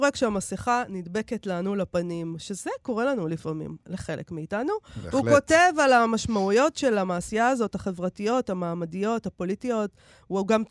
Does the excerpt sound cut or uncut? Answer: uncut